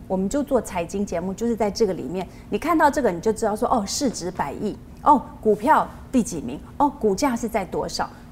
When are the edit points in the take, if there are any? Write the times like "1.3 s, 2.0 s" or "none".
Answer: none